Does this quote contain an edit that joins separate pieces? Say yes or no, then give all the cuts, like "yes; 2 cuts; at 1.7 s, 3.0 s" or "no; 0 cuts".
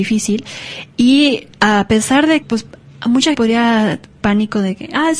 yes; 4 cuts; at 1.5 s, 2.4 s, 3.3 s, 4.2 s